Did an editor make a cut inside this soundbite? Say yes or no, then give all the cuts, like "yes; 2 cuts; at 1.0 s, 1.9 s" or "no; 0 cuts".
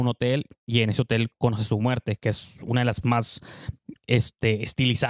yes; 1 cut; at 3.0 s